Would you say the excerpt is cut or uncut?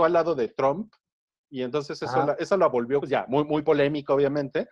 cut